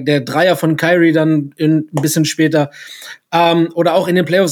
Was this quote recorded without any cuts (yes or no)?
yes